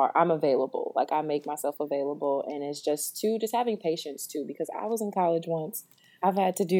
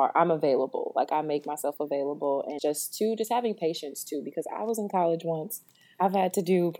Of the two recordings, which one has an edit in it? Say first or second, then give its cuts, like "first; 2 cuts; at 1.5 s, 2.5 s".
second; 1 cut; at 2.6 s